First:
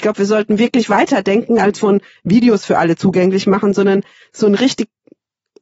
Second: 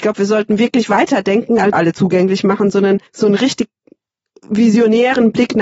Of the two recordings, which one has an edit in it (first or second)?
second